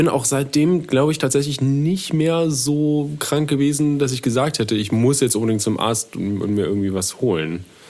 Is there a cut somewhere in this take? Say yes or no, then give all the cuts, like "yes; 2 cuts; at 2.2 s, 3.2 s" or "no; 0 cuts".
no; 0 cuts